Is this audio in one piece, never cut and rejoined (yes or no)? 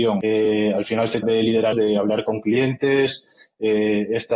no